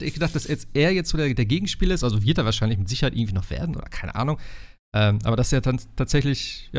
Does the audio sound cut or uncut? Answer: uncut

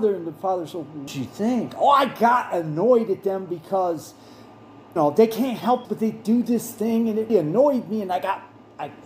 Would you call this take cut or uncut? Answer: cut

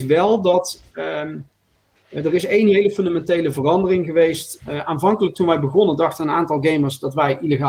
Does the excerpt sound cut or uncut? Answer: uncut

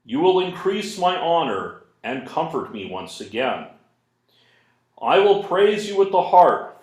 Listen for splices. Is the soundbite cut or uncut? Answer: uncut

